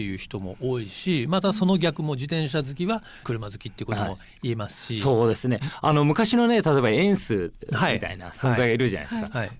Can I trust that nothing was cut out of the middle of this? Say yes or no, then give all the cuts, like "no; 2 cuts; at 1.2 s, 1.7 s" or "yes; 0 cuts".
no; 1 cut; at 3.2 s